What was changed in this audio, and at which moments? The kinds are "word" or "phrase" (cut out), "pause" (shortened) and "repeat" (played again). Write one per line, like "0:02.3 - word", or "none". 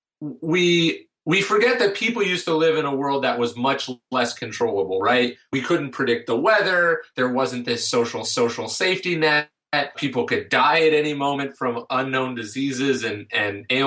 0:08.2 - repeat
0:09.9 - word